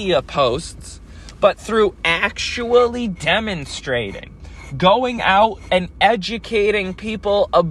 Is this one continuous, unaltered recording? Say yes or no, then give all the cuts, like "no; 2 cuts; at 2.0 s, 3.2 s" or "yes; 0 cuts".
yes; 0 cuts